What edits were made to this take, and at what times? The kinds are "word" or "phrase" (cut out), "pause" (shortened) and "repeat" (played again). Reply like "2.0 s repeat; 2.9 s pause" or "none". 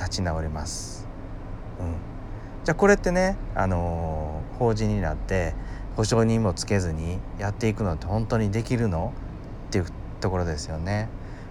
none